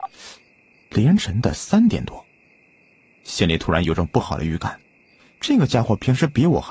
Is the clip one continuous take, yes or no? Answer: yes